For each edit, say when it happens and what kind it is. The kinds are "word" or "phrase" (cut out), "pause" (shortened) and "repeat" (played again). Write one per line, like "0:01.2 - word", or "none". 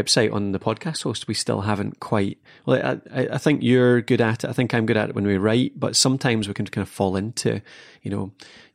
none